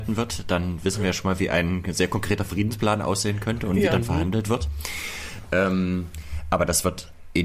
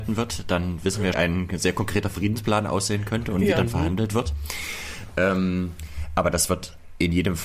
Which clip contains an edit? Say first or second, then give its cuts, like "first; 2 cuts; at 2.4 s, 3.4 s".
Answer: second; 1 cut; at 1.1 s